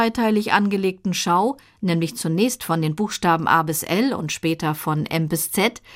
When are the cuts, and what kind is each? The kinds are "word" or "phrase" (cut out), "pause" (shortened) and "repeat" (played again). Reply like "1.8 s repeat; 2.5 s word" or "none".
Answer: none